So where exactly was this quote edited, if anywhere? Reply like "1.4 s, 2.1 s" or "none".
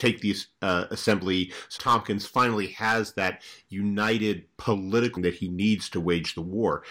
1.8 s, 5.2 s